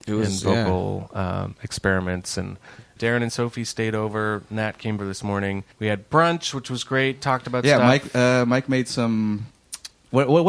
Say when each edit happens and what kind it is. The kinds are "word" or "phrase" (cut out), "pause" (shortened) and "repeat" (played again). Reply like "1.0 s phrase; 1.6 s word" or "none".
3.0 s word; 5.0 s phrase; 5.7 s pause